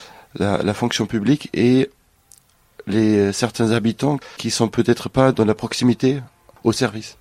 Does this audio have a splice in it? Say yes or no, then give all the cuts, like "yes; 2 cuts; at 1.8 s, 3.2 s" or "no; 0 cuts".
yes; 1 cut; at 5.3 s